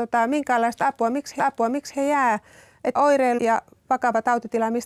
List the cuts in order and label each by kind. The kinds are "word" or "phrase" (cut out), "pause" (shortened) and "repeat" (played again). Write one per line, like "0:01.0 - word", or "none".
0:01.4 - repeat
0:03.0 - phrase
0:03.4 - word